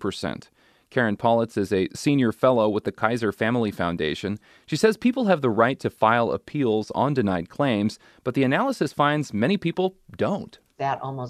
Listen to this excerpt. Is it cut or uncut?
uncut